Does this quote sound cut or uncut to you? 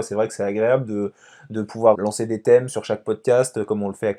cut